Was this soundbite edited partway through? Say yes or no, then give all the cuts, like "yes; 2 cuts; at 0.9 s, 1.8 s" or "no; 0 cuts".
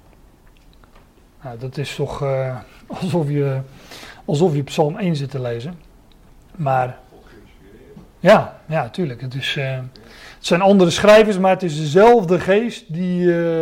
no; 0 cuts